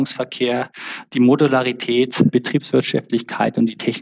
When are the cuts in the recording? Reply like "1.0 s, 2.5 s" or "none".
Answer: 2.3 s